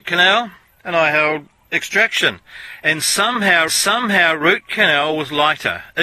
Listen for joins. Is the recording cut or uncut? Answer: cut